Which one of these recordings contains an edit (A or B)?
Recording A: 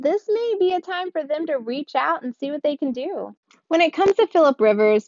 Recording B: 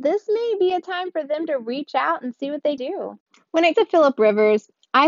B